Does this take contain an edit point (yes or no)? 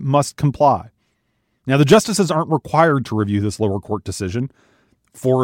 no